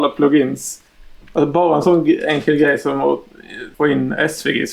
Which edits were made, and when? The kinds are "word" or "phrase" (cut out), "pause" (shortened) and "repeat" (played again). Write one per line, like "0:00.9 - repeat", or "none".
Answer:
0:03.7 - pause

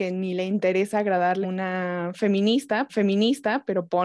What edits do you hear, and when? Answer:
0:01.4 - word
0:02.9 - repeat

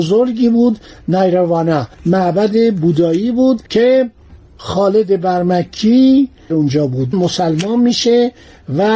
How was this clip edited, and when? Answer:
0:01.9 - pause
0:03.7 - pause
0:06.5 - word
0:07.1 - word

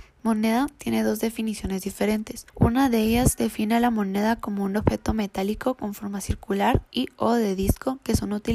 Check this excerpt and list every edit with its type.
0:02.5 - pause

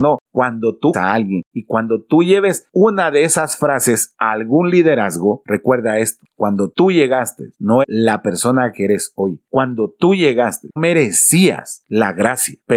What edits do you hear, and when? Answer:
0:00.9 - word
0:07.8 - word
0:10.8 - word

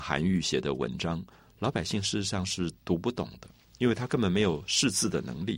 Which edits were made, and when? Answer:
0:02.8 - pause

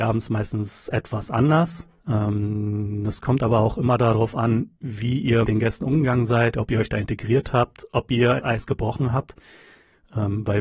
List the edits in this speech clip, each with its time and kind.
0:02.0 - pause
0:04.8 - pause
0:05.4 - word
0:08.4 - phrase

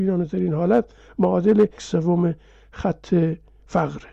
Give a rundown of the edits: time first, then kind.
0:01.8 - word

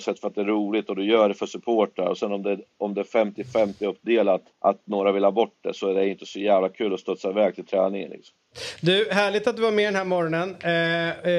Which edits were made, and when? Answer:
0:04.5 - pause

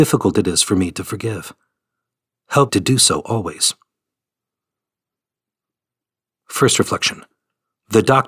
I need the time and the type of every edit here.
0:02.7 - word

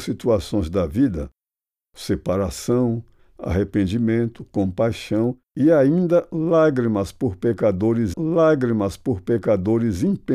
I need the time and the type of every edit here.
0:03.2 - word
0:05.5 - pause
0:08.1 - repeat

